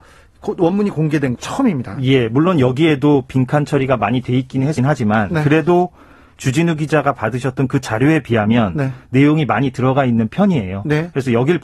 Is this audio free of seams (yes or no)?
no